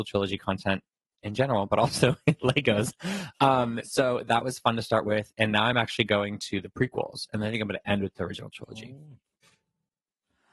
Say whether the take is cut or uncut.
uncut